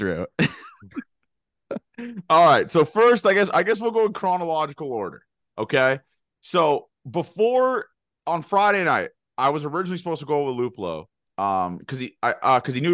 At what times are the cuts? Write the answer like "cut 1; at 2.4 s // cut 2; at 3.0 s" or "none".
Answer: none